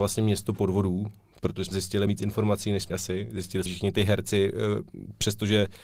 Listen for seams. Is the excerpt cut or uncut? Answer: cut